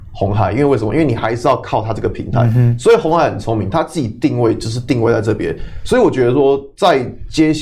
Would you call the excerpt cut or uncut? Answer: uncut